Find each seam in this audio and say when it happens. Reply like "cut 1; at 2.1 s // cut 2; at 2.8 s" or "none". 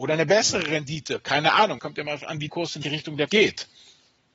cut 1; at 1.8 s // cut 2; at 2.5 s // cut 3; at 2.8 s // cut 4; at 3.3 s